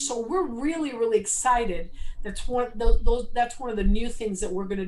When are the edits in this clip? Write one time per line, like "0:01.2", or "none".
none